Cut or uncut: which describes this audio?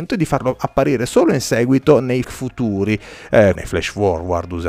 cut